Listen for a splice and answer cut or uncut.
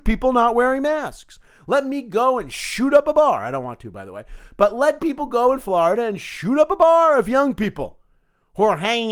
uncut